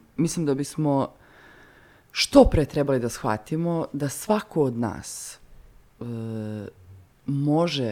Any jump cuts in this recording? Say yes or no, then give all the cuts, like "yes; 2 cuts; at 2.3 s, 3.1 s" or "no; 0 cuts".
no; 0 cuts